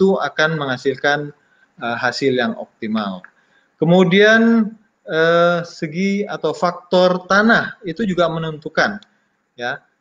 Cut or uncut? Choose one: uncut